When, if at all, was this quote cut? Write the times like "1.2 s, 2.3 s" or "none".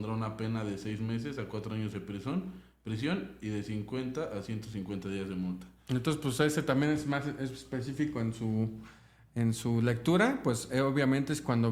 none